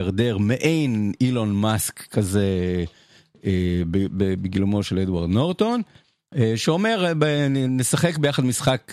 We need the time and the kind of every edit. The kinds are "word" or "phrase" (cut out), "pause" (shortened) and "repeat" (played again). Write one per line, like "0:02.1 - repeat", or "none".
none